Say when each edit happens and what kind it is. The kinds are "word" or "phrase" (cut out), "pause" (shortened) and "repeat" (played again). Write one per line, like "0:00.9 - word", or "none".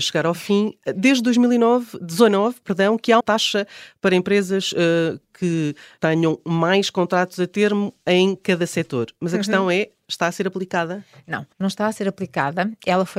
0:03.2 - word
0:06.0 - word
0:11.5 - pause